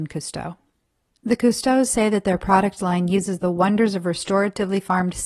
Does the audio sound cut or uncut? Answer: uncut